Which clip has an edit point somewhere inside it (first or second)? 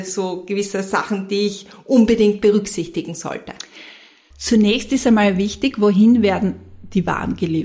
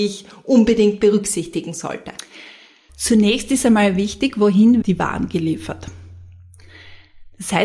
second